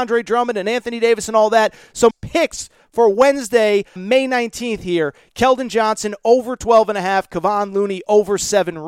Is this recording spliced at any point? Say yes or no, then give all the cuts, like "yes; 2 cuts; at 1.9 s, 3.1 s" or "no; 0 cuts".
yes; 2 cuts; at 2.1 s, 4.0 s